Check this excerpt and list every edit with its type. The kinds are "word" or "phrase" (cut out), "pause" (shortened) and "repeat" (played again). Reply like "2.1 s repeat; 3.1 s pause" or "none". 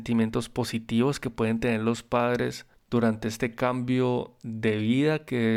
none